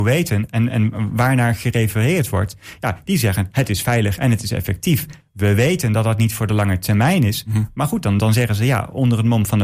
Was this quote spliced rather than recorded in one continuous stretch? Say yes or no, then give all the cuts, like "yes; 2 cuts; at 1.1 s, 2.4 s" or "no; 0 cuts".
no; 0 cuts